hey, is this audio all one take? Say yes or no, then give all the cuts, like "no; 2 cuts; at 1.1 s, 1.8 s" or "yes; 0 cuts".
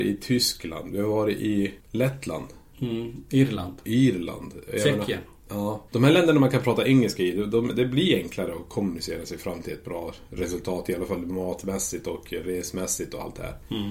no; 2 cuts; at 1.8 s, 5.9 s